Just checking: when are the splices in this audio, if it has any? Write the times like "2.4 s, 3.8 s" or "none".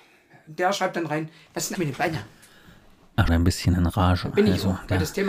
1.8 s, 3.3 s